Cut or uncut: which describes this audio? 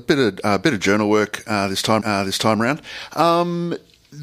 cut